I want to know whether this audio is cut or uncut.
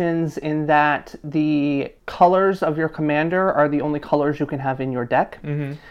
cut